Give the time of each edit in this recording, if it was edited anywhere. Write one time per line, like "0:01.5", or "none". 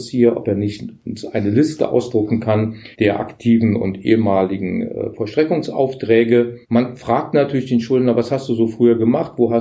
0:02.9
0:06.6